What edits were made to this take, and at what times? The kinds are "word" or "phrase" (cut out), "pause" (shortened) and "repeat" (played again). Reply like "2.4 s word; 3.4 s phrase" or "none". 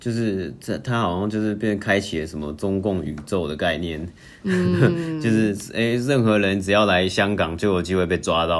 none